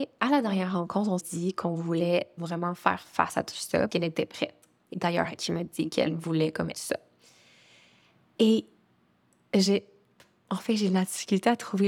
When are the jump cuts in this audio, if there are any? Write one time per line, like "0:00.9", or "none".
0:01.2
0:02.4
0:03.9
0:04.9
0:05.4
0:06.7